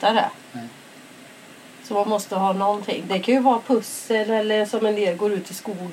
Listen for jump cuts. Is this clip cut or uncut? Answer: uncut